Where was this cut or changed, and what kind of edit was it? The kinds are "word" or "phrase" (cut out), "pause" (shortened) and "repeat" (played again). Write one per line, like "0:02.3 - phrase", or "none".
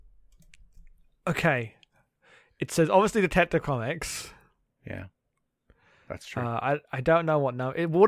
none